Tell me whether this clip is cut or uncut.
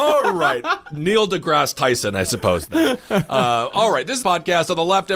cut